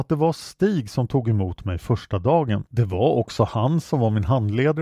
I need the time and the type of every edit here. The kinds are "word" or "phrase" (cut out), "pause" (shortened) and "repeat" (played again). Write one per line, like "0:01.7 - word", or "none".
0:02.7 - pause